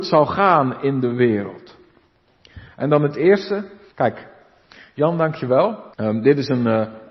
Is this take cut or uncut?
cut